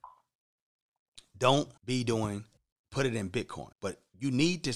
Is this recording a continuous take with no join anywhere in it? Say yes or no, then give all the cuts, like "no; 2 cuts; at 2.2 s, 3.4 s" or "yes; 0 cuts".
no; 3 cuts; at 1.8 s, 2.6 s, 3.7 s